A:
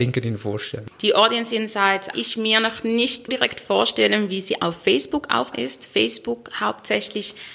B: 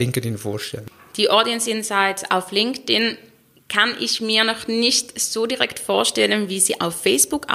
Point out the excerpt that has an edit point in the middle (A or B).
A